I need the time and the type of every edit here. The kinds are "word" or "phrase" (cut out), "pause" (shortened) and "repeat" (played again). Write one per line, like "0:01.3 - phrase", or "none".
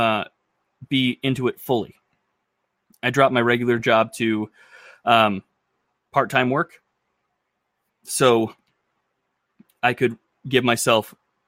none